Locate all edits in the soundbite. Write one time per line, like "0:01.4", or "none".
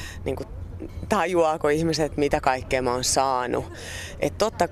none